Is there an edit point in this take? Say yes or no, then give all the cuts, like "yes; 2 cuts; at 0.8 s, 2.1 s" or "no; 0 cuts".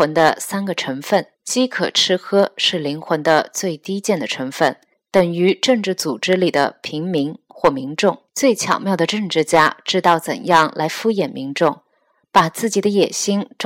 yes; 3 cuts; at 1.3 s, 4.9 s, 8.3 s